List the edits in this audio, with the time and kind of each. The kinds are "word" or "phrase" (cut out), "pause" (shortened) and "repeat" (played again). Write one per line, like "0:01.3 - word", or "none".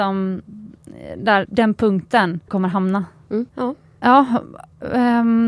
0:01.4 - word
0:02.5 - phrase
0:03.5 - pause